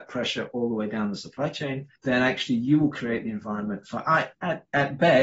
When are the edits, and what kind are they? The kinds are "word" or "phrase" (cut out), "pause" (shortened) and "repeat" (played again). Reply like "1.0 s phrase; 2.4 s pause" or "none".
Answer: 2.0 s pause